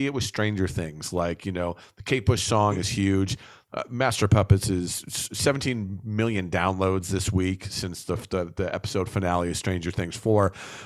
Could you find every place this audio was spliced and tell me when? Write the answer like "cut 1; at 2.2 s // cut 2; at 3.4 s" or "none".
none

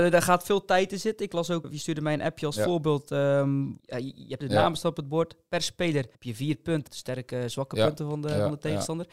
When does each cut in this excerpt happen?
cut 1; at 1.6 s // cut 2; at 3.8 s // cut 3; at 4.4 s // cut 4; at 6.1 s // cut 5; at 6.9 s

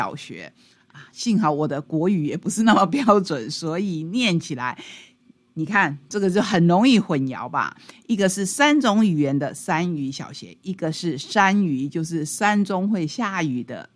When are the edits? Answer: none

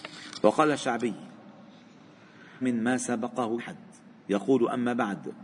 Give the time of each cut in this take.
cut 1; at 2.6 s // cut 2; at 3.6 s

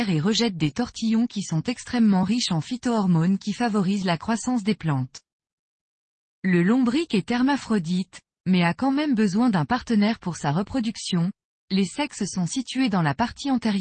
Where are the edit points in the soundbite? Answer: none

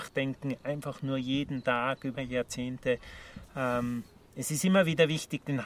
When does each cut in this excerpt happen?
cut 1; at 2.1 s

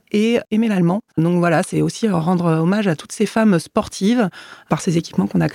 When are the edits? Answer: cut 1; at 1.1 s

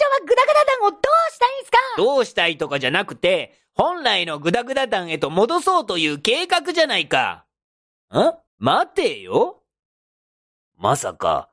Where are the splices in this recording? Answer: cut 1; at 8.5 s

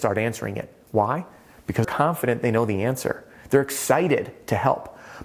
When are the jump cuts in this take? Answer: cut 1; at 1.8 s

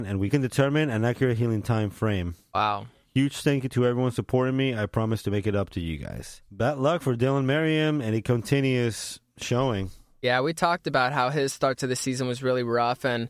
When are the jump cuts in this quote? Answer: none

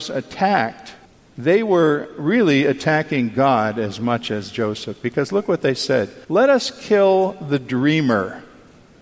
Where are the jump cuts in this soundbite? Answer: cut 1; at 1.0 s // cut 2; at 6.2 s

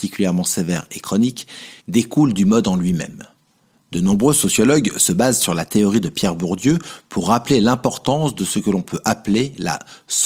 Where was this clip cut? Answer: cut 1; at 1.8 s

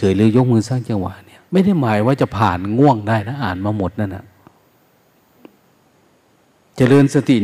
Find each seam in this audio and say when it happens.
cut 1; at 1.4 s

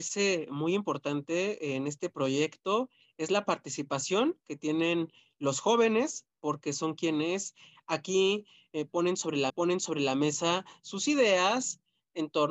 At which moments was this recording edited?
cut 1; at 9.5 s

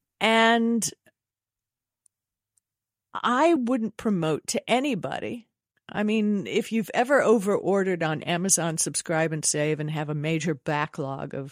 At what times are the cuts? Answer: none

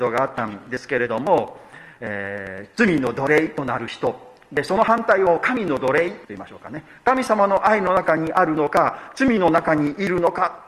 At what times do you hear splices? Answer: cut 1; at 6.2 s

